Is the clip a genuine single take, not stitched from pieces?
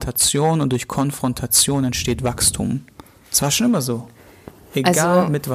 yes; 0 cuts

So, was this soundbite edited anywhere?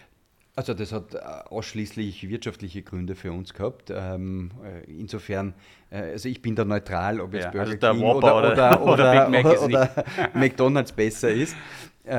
no; 0 cuts

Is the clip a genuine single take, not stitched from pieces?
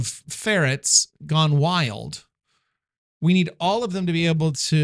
yes; 0 cuts

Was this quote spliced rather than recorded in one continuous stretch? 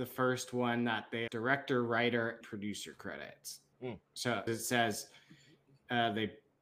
yes; 4 cuts; at 1.3 s, 2.4 s, 3.7 s, 4.5 s

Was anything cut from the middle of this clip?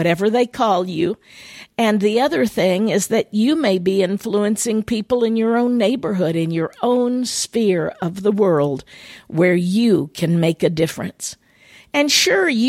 no; 0 cuts

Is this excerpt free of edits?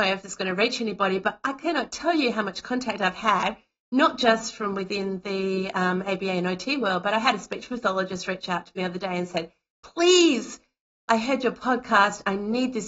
yes; 0 cuts

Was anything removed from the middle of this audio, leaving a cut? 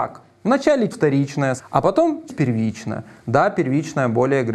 yes; 3 cuts; at 0.9 s, 1.6 s, 2.3 s

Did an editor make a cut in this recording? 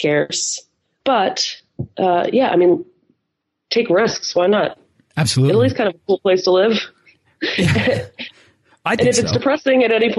no; 0 cuts

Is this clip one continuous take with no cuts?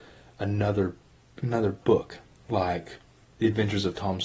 yes; 0 cuts

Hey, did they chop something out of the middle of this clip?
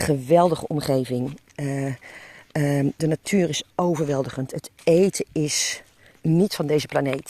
yes; 1 cut; at 3.0 s

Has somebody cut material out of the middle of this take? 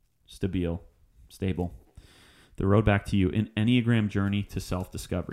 no; 0 cuts

